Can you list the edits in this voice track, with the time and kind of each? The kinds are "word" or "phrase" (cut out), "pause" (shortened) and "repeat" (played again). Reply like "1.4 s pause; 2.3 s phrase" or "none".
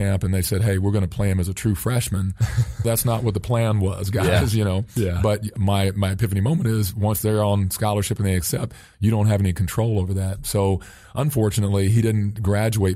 2.8 s word